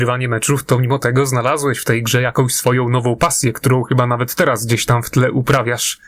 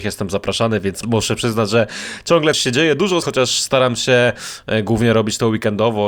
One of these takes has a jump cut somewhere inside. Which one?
second; 2 cuts; at 2.5 s, 3.2 s

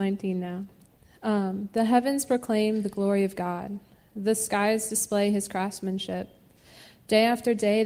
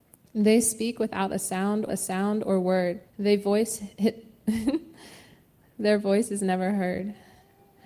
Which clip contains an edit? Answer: second; 2 cuts; at 1.9 s, 3.1 s

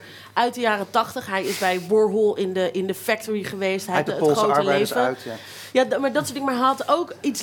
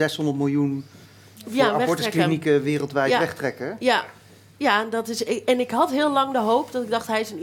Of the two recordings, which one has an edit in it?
first; 1 cut; at 4.1 s

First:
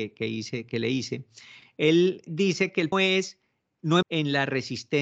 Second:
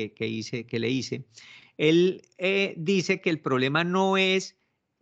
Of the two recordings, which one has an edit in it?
first; 3 cuts; at 2.3 s, 2.9 s, 4.0 s

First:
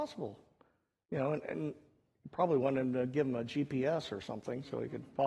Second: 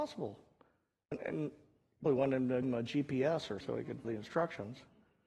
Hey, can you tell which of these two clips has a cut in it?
second; 5 cuts; at 1.1 s, 2.1 s, 2.6 s, 3.6 s, 4.0 s

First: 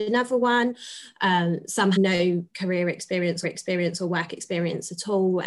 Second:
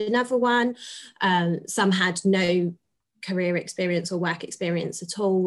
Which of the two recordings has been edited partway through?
first; 3 cuts; at 1.9 s, 2.5 s, 3.4 s

